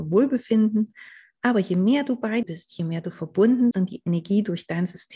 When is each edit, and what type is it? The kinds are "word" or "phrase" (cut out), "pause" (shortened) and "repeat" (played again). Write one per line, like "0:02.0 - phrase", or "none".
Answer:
0:02.4 - word
0:03.7 - word